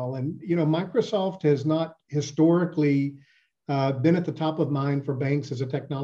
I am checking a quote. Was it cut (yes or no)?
no